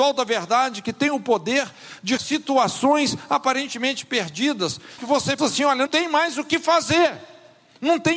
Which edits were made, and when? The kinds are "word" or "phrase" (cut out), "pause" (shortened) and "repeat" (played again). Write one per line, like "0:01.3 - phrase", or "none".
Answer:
0:02.2 - word
0:05.0 - word
0:05.4 - word
0:05.9 - word